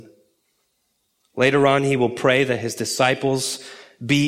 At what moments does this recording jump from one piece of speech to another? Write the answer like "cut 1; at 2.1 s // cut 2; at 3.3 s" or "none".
none